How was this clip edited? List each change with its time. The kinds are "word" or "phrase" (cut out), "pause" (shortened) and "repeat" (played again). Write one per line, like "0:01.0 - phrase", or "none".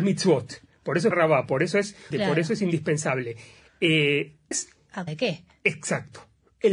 0:01.1 - word
0:02.1 - word
0:04.5 - phrase
0:05.1 - word